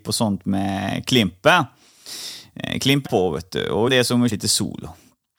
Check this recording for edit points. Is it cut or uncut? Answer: cut